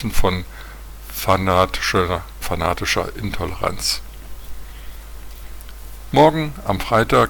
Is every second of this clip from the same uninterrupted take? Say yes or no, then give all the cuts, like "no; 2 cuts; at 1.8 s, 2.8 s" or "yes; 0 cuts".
no; 1 cut; at 2.4 s